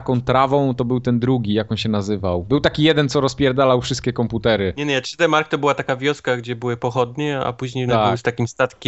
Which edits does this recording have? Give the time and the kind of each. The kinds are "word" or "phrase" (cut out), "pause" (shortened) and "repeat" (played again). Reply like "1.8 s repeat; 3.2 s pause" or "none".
7.9 s word